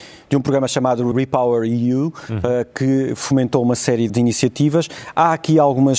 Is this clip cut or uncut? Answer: cut